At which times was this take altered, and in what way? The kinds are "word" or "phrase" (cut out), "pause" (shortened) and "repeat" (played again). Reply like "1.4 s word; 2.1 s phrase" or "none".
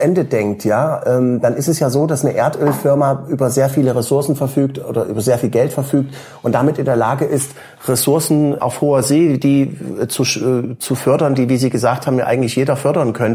8.6 s word